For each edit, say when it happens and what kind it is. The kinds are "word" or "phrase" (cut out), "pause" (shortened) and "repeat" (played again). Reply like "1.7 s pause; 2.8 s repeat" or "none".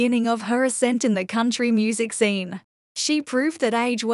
none